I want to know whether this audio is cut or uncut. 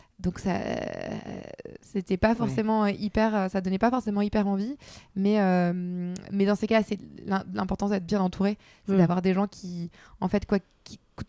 uncut